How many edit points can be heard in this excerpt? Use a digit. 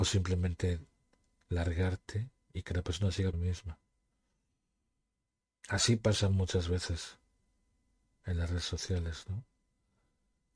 1